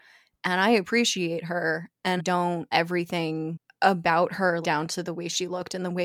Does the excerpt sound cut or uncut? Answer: cut